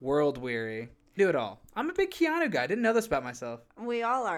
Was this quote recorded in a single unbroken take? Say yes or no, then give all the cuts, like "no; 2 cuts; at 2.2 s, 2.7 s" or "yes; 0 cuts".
no; 1 cut; at 1.2 s